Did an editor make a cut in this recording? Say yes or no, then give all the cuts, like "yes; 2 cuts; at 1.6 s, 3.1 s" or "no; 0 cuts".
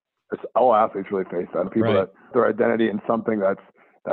yes; 2 cuts; at 1.7 s, 2.3 s